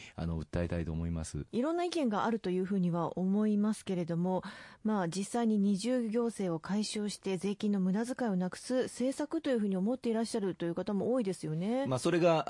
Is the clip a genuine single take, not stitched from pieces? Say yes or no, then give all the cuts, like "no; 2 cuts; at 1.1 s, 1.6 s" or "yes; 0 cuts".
no; 1 cut; at 1.5 s